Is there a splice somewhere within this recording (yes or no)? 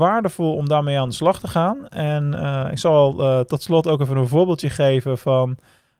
no